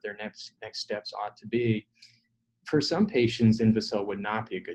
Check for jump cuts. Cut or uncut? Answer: uncut